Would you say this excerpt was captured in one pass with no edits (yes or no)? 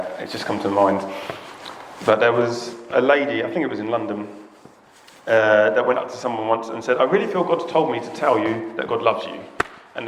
yes